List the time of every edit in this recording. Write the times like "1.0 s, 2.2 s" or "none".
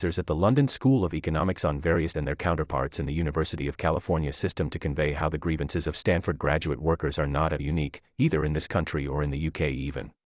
2.1 s, 7.6 s